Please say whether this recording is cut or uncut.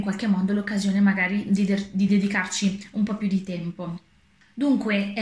uncut